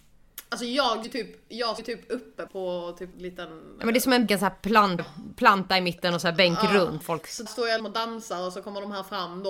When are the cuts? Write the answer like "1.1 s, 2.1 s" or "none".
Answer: 1.0 s, 1.8 s, 2.5 s, 3.1 s, 4.3 s, 5.0 s, 7.0 s, 7.5 s, 7.8 s

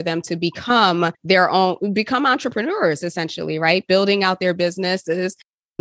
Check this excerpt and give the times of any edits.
1.1 s

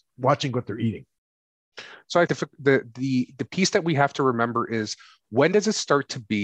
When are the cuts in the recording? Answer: 2.3 s

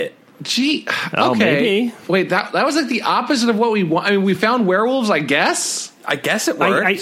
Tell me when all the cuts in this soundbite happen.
none

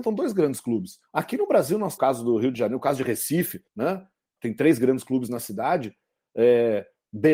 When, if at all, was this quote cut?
1.1 s, 2.0 s, 3.7 s, 4.4 s

